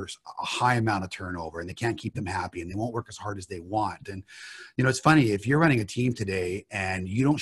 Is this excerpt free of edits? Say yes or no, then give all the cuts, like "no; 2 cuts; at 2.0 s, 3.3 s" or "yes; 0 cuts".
yes; 0 cuts